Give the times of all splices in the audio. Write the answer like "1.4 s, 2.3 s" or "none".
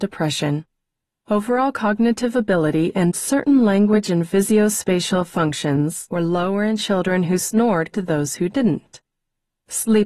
7.9 s